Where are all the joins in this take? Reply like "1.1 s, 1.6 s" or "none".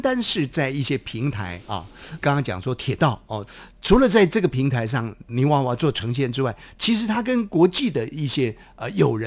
5.3 s